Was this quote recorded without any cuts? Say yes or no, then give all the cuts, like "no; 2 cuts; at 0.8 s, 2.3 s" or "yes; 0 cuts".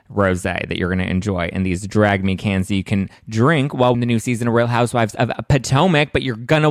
no; 1 cut; at 3.9 s